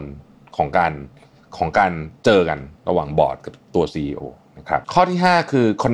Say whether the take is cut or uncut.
cut